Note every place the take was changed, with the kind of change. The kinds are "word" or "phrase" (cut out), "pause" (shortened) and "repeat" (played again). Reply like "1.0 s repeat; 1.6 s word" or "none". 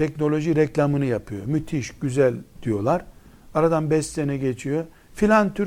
none